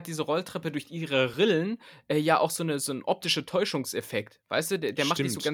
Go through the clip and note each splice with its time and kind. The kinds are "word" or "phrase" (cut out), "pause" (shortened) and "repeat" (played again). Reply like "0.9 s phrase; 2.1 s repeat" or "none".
none